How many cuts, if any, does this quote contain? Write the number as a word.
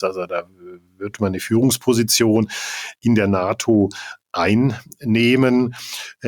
zero